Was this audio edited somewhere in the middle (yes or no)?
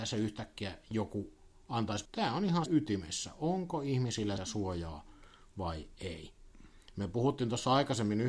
yes